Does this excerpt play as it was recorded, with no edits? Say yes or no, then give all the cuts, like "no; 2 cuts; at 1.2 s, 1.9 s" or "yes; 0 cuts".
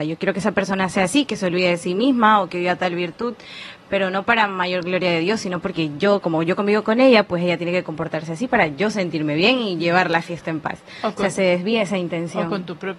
yes; 0 cuts